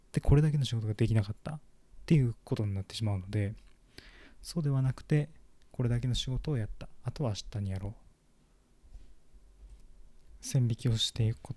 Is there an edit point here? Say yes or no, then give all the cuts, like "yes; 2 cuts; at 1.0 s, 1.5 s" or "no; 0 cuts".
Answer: no; 0 cuts